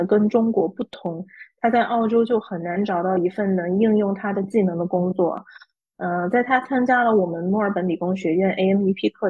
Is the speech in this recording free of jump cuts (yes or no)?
yes